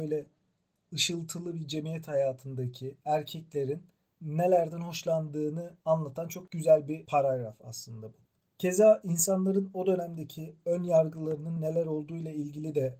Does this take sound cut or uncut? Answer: uncut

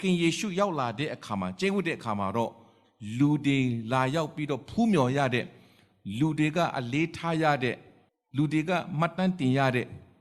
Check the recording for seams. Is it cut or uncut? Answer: uncut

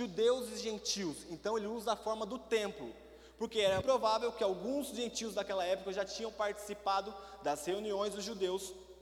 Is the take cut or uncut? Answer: cut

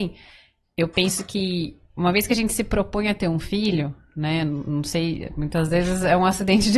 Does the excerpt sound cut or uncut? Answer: uncut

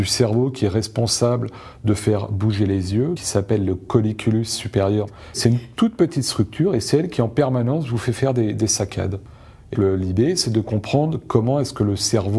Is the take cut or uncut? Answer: cut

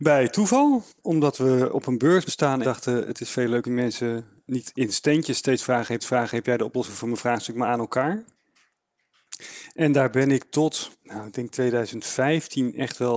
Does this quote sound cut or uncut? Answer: cut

